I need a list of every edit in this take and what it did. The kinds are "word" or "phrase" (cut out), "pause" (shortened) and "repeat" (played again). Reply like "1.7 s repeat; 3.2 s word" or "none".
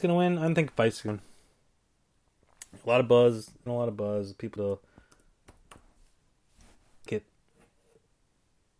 1.1 s word; 3.7 s word; 4.6 s word; 7.1 s word